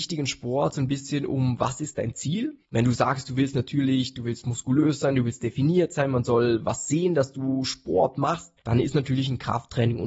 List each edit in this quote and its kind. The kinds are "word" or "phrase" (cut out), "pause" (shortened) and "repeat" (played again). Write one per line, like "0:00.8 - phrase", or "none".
0:02.6 - pause
0:08.6 - pause